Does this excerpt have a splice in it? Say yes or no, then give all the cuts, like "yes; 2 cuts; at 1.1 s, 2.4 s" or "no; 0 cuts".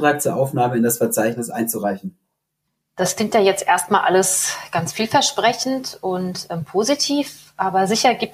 no; 0 cuts